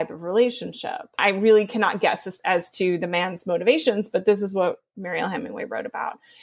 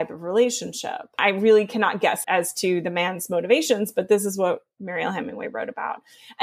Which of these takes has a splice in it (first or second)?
second